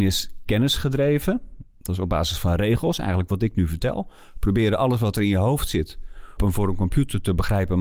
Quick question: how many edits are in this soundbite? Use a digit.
1